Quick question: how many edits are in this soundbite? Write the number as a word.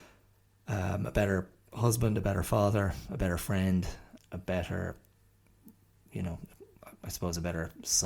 one